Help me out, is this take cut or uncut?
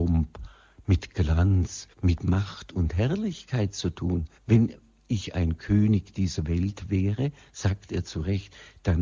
cut